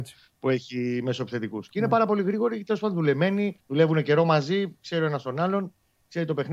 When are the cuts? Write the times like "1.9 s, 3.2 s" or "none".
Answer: 3.6 s